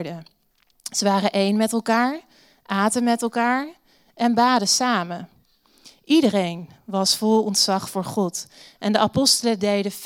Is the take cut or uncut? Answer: uncut